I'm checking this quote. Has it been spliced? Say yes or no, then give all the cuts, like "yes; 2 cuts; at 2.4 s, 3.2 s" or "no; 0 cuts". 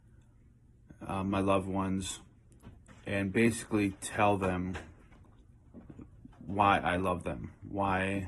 no; 0 cuts